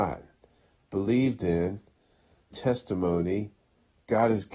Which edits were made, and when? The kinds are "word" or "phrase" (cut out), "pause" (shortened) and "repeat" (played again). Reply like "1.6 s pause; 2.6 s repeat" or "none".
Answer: 2.5 s word